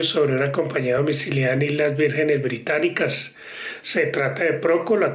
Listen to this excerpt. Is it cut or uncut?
uncut